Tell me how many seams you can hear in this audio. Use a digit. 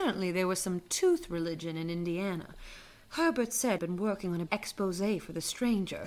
2